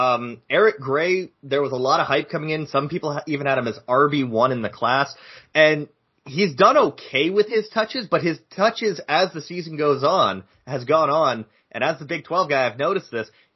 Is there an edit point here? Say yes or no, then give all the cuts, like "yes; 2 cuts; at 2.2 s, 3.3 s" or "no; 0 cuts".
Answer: no; 0 cuts